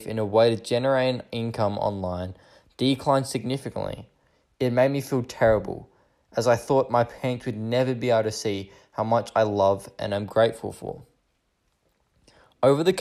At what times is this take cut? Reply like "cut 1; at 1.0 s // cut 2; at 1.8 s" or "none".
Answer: none